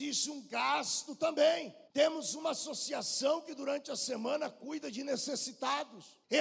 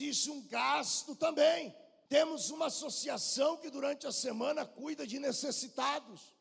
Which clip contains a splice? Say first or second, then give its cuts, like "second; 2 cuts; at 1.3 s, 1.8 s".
first; 1 cut; at 1.9 s